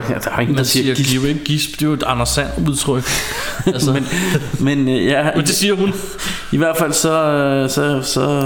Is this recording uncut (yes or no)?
yes